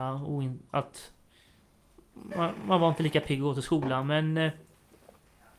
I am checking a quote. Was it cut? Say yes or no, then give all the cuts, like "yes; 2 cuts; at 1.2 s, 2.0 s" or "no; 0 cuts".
no; 0 cuts